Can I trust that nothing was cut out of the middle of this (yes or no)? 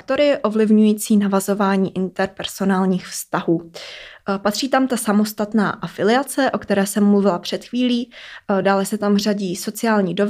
yes